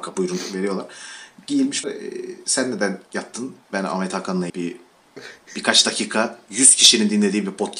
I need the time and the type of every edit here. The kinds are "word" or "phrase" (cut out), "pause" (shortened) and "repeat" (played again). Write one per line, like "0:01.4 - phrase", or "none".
0:01.8 - word
0:03.6 - pause
0:04.5 - word